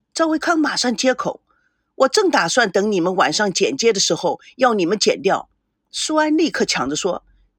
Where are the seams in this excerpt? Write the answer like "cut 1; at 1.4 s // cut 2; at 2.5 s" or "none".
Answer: none